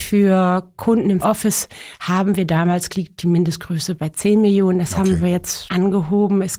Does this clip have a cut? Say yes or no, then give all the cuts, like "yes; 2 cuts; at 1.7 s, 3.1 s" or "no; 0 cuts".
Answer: yes; 3 cuts; at 1.2 s, 2.9 s, 5.7 s